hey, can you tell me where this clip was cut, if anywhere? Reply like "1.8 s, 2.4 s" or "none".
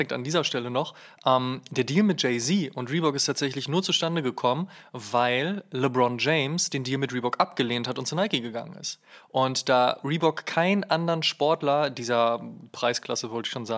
none